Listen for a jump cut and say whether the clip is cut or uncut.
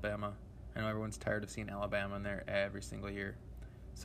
uncut